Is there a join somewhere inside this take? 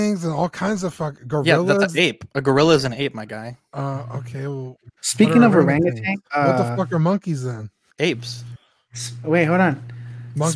yes; 5 cuts; at 2.3 s, 3.6 s, 5.0 s, 6.2 s, 7.9 s

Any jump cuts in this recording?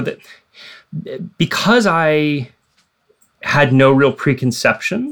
no; 0 cuts

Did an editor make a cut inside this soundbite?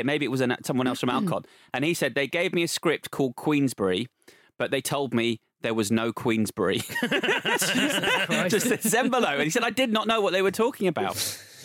no; 0 cuts

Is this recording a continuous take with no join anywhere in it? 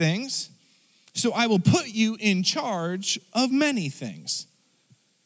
yes; 0 cuts

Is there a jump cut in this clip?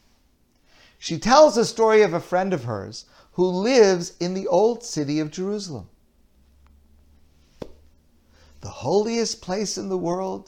no; 0 cuts

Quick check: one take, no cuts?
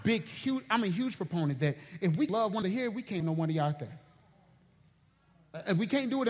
no; 3 cuts; at 2.3 s, 2.6 s, 3.2 s

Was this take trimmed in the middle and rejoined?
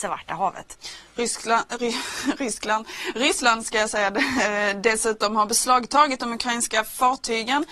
no; 0 cuts

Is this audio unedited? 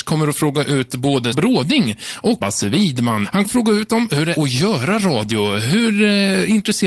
no; 4 cuts; at 1.3 s, 2.4 s, 3.4 s, 4.4 s

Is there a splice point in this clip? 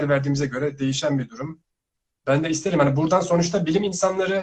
no; 0 cuts

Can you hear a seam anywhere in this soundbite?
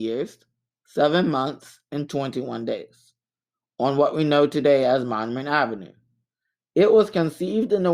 no; 0 cuts

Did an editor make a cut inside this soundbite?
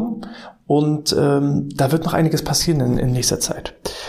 no; 0 cuts

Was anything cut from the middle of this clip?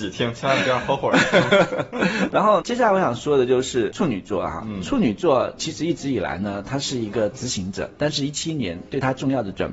yes; 1 cut; at 2.3 s

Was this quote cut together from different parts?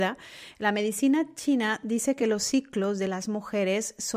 no; 0 cuts

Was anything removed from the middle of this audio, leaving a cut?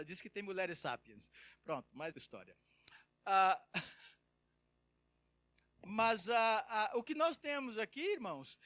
yes; 1 cut; at 2.1 s

